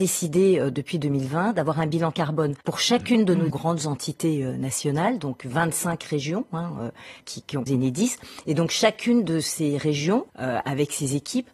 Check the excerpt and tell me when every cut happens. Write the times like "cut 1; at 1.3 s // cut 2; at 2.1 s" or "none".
cut 1; at 2.6 s // cut 2; at 3.5 s // cut 3; at 7.2 s // cut 4; at 7.7 s // cut 5; at 10.3 s